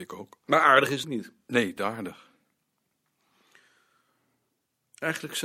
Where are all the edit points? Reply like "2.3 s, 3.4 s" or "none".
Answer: 1.0 s, 1.8 s